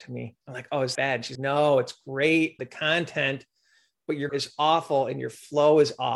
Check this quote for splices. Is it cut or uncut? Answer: cut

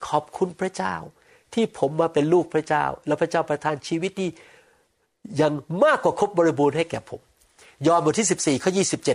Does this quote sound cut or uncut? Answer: uncut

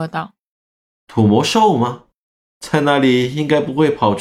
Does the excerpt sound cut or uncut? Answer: uncut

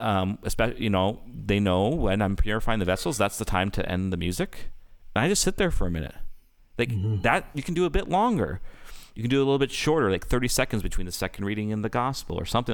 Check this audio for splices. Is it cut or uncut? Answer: uncut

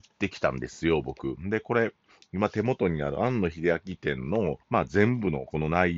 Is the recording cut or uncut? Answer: cut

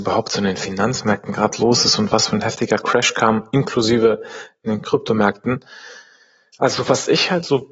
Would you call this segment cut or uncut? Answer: uncut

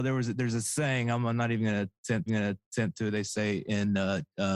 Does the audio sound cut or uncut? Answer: cut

